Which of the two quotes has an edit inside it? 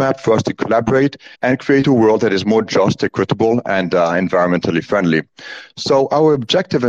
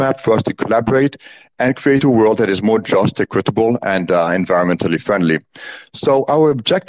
first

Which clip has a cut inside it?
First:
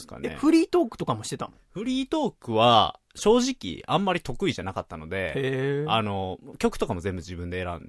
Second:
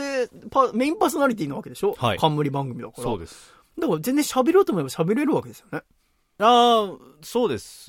first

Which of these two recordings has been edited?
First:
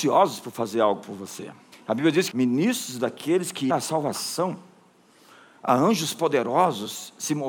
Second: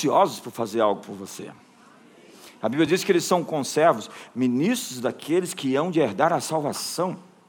first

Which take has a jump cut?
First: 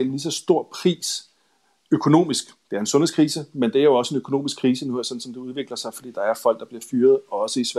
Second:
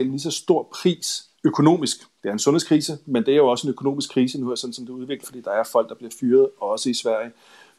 second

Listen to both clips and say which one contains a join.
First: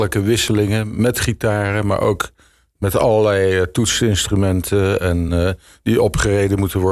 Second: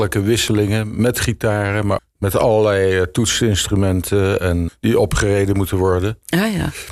second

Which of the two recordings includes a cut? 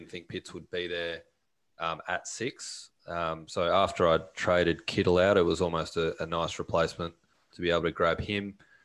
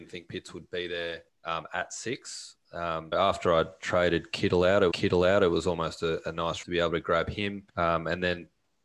second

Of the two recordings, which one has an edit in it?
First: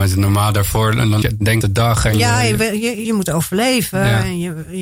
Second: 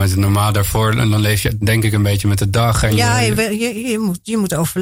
first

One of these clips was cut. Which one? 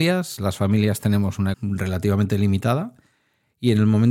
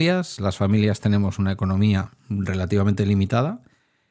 first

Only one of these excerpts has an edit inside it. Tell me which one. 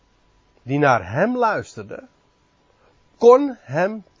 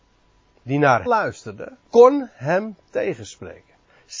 second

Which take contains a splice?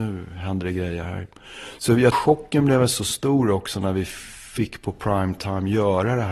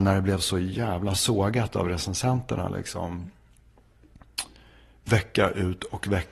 first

